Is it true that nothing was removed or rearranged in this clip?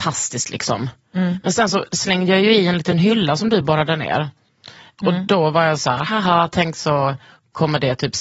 yes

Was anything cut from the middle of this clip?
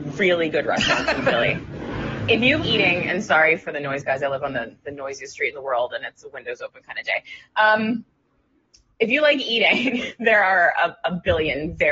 yes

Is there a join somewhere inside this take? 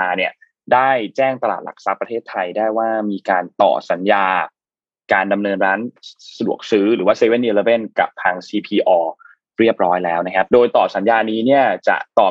no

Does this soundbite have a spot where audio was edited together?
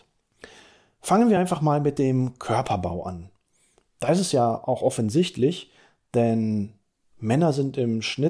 no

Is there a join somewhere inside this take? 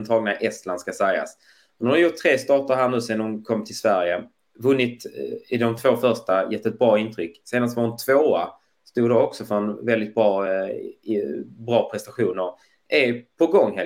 no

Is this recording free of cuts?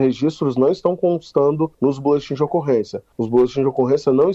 no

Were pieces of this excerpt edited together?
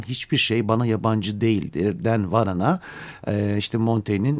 no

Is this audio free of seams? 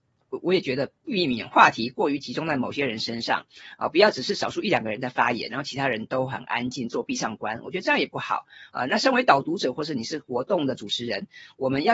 no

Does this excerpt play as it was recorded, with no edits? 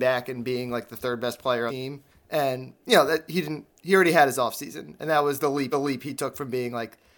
no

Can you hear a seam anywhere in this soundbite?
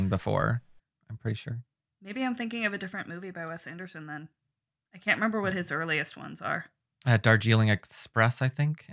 no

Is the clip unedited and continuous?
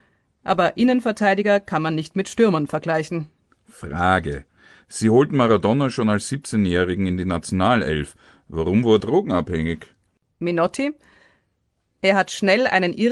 no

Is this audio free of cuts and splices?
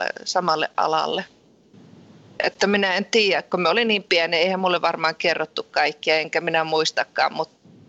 yes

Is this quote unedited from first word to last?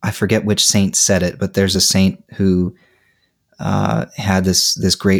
yes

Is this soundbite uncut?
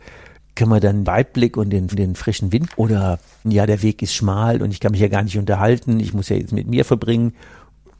no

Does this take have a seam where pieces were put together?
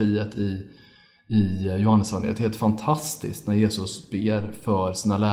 no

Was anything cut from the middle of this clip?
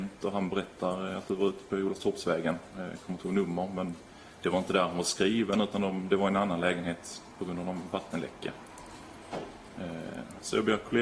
no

